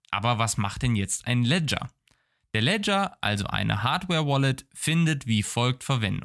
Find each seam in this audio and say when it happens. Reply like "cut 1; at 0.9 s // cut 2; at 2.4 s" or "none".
none